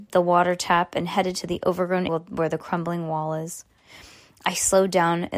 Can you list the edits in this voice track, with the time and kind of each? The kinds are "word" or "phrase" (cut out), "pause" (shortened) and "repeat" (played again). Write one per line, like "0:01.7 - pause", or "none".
0:02.1 - word